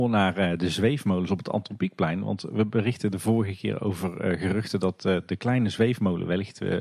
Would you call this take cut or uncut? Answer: uncut